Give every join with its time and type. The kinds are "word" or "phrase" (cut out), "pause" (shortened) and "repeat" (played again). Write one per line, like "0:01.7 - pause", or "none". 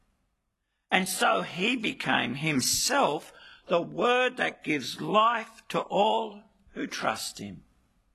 none